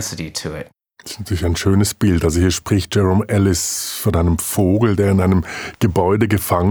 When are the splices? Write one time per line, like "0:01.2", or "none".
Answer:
none